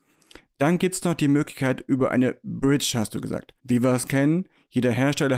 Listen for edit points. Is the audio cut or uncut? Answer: cut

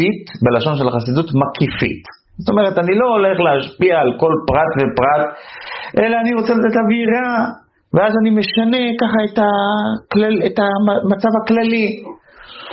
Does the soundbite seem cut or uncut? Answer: uncut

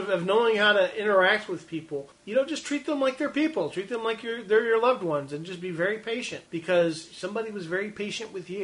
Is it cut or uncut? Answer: cut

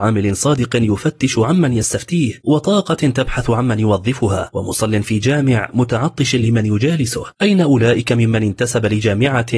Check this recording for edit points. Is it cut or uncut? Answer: uncut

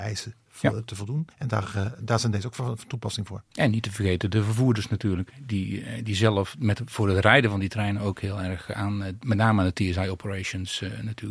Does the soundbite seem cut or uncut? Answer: cut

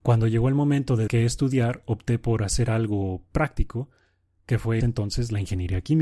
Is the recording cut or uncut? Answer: cut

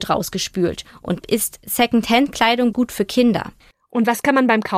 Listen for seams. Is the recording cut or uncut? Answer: cut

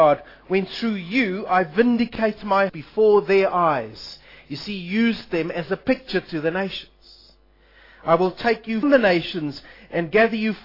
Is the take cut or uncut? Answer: cut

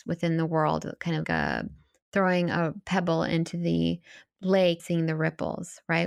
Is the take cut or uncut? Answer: cut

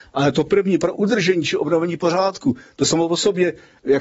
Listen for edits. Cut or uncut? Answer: cut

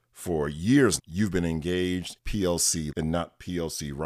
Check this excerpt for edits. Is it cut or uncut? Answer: cut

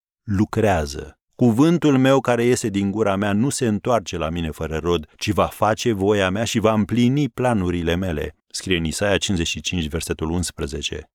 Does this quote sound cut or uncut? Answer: cut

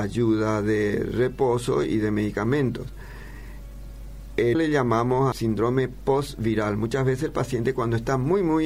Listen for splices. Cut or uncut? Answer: cut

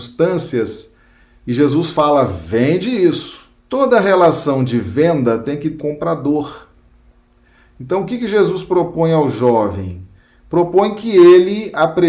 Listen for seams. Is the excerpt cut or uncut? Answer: cut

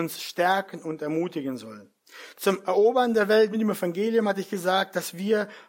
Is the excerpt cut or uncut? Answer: uncut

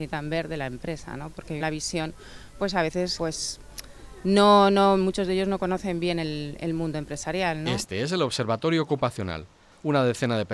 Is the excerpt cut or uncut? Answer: cut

